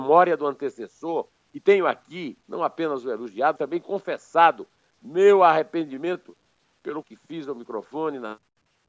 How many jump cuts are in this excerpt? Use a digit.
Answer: 3